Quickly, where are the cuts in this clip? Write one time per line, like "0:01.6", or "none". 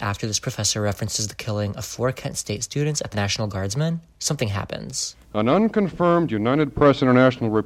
0:03.1
0:04.1
0:05.2